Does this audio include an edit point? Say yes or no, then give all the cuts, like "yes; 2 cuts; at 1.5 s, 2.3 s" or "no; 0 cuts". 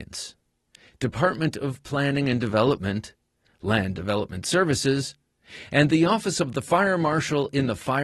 no; 0 cuts